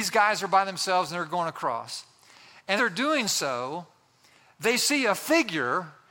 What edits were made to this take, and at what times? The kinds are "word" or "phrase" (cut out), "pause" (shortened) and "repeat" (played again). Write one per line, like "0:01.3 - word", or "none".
0:02.8 - word